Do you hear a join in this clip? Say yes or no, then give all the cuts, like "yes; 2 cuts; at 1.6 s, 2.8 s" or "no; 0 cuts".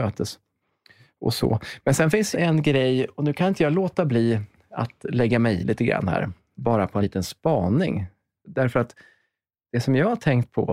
yes; 3 cuts; at 2.3 s, 5.6 s, 7.0 s